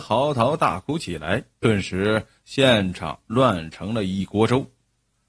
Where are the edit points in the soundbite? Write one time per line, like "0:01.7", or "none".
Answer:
0:01.5